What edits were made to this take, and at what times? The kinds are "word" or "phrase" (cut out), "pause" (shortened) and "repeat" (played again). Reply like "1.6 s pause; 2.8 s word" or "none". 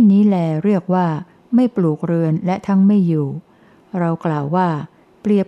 none